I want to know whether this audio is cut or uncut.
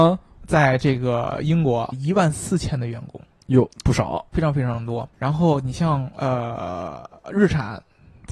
cut